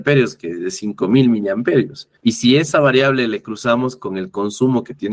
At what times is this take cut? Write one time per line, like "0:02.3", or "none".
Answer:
0:02.2